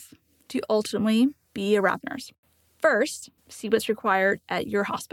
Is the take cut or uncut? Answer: cut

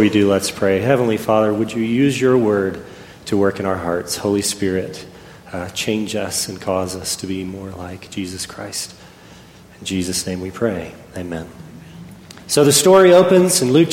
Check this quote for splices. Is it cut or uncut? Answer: cut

